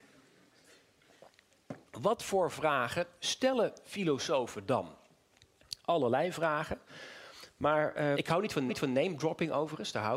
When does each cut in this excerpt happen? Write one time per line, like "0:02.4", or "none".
0:01.9
0:08.1
0:08.7

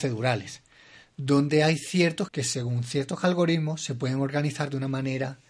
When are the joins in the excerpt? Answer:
0:02.3

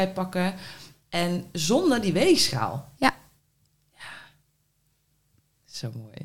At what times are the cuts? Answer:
none

